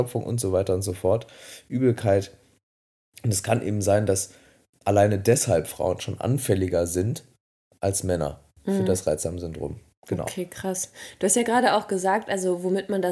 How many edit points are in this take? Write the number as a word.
zero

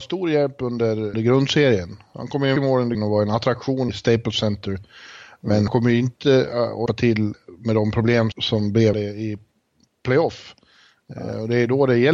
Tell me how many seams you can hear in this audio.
eight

